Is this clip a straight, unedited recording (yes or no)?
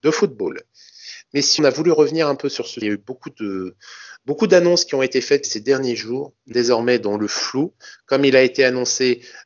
no